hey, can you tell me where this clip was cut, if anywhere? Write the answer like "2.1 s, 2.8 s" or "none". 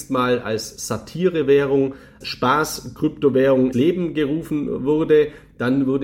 2.2 s, 3.7 s